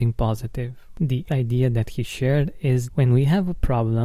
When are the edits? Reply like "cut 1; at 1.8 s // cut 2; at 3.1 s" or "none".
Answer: cut 1; at 1.3 s // cut 2; at 2.9 s